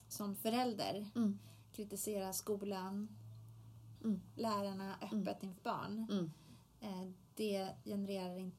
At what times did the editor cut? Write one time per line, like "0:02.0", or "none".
0:04.0
0:05.6